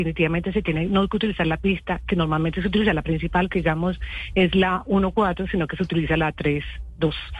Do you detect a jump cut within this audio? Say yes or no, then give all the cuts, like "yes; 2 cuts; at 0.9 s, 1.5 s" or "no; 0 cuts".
no; 0 cuts